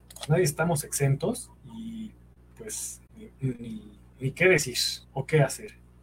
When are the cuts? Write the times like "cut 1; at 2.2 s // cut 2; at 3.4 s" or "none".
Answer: cut 1; at 1.6 s // cut 2; at 3.1 s // cut 3; at 4.1 s // cut 4; at 5.0 s